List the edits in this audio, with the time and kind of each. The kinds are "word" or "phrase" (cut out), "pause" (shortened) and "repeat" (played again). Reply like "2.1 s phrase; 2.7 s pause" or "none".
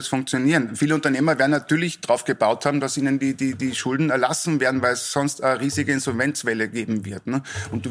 none